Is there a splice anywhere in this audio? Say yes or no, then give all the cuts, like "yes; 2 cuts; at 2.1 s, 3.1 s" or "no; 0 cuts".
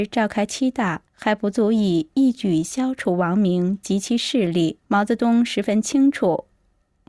yes; 2 cuts; at 1.1 s, 4.8 s